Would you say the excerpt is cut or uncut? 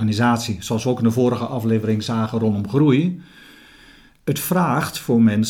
uncut